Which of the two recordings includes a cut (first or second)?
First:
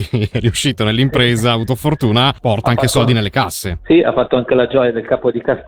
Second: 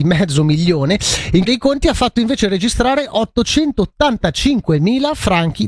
second